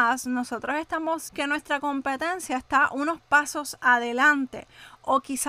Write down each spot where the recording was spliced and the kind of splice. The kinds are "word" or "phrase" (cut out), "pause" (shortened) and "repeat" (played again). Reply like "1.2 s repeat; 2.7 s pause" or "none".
1.3 s word